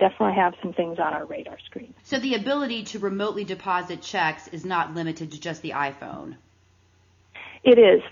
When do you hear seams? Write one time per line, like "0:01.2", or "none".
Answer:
0:02.0